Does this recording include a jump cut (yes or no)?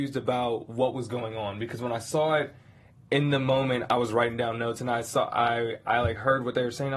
no